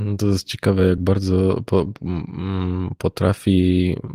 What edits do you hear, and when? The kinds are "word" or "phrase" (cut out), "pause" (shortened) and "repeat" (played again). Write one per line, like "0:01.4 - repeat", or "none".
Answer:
none